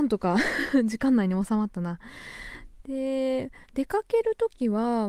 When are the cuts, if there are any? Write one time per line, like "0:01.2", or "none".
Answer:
0:03.6